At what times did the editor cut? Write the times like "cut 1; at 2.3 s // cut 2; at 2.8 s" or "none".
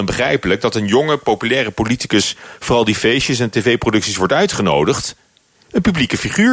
none